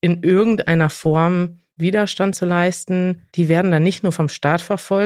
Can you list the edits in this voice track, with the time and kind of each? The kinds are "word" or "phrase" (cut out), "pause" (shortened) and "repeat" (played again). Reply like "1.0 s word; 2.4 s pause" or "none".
1.7 s pause; 3.3 s pause